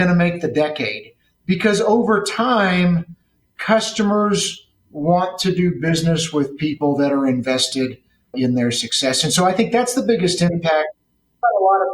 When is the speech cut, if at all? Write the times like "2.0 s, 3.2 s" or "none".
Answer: 8.3 s